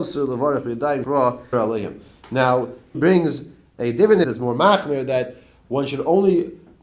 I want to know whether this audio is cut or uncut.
cut